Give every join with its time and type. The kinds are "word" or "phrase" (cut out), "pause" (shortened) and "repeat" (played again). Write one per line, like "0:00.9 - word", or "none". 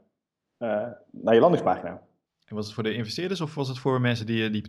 0:02.2 - pause